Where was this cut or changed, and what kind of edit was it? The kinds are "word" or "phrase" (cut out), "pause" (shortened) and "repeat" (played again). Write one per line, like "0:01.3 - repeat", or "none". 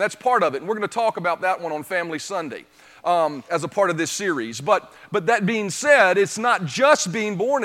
0:03.5 - word